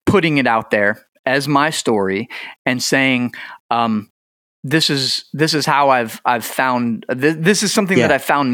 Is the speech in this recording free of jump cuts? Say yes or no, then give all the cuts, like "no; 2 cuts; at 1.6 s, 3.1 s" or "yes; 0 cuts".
yes; 0 cuts